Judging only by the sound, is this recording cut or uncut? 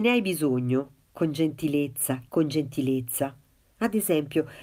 cut